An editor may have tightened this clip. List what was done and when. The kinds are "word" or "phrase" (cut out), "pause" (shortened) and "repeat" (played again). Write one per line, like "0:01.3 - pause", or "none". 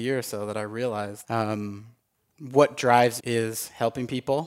0:01.2 - word
0:03.2 - word